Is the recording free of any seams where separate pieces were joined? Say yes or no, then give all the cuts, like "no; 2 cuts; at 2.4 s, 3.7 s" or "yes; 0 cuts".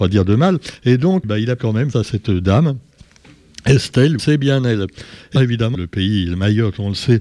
no; 6 cuts; at 1.2 s, 1.6 s, 1.9 s, 4.2 s, 5.4 s, 5.7 s